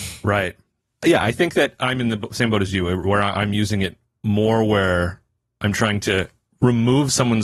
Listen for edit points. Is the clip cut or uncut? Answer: uncut